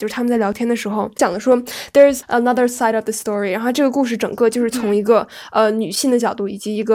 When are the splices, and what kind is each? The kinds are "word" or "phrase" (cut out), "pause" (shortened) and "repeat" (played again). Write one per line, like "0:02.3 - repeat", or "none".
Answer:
0:02.2 - word